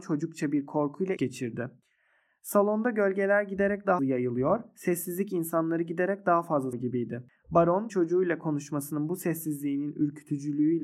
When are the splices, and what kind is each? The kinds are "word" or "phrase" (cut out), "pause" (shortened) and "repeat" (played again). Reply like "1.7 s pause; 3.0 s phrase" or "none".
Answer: 1.2 s word; 4.0 s word; 6.7 s word; 7.9 s word

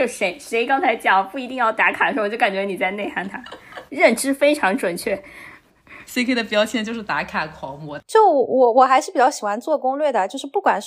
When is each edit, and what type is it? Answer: 3.9 s pause

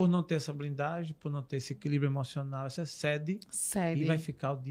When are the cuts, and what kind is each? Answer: 2.8 s word

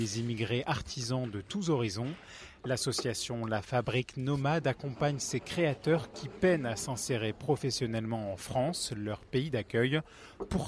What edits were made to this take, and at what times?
none

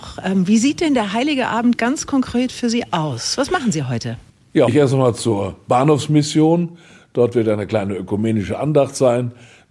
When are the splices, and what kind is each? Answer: 4.7 s phrase

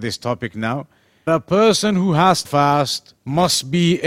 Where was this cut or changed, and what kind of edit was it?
1.3 s word; 2.4 s word; 3.2 s pause

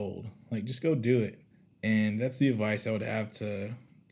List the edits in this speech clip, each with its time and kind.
1.5 s pause

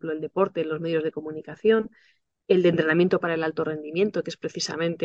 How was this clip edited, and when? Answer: none

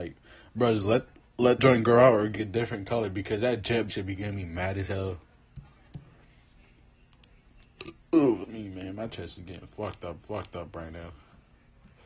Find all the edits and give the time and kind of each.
1.6 s word; 2.4 s word; 3.9 s word; 8.4 s word; 10.2 s repeat

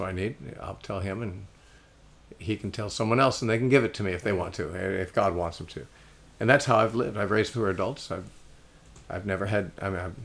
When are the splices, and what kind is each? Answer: 7.5 s phrase

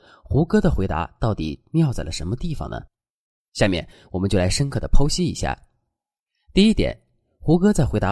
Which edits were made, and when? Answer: none

